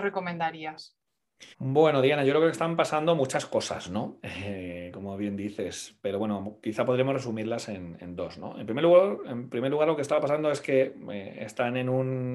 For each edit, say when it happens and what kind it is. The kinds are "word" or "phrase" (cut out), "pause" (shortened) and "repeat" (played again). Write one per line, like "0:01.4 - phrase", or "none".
0:01.5 - pause